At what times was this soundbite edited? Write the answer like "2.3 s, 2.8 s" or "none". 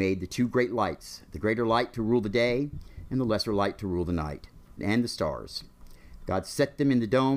4.8 s